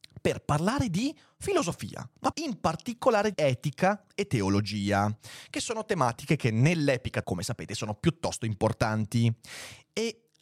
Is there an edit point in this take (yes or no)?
yes